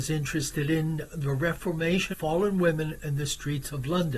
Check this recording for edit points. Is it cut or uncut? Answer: cut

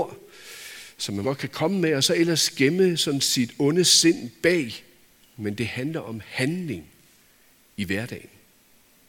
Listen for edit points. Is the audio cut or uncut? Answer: cut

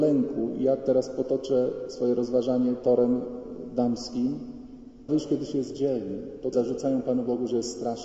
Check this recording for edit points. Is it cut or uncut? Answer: cut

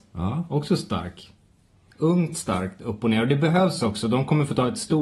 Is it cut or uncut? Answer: uncut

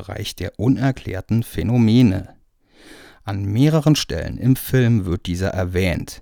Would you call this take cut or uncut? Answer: uncut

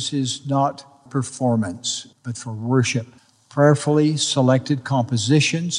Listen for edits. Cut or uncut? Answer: cut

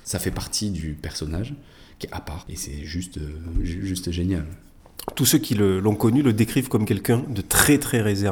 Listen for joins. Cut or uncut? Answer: uncut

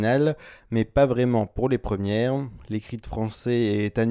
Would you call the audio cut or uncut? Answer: uncut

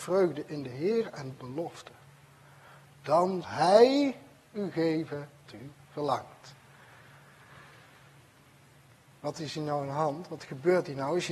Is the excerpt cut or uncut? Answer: cut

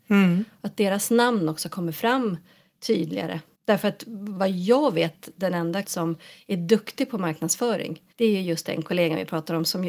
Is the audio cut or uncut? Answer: cut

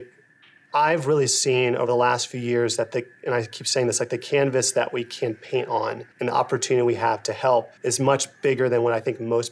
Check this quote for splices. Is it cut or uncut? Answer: cut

